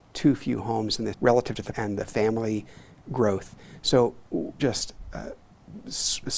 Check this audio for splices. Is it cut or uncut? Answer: cut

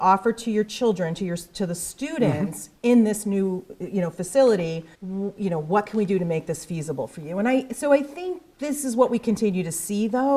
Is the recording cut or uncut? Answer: cut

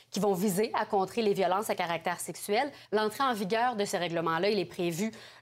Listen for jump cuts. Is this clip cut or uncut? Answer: cut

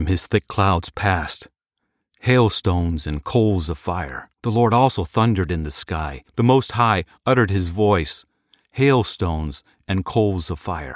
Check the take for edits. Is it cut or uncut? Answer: cut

